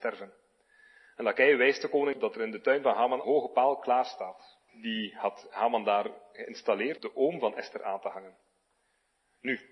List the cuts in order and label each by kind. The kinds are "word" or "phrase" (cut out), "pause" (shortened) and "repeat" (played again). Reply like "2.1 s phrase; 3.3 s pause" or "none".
2.1 s word; 3.2 s phrase; 4.7 s pause; 7.0 s word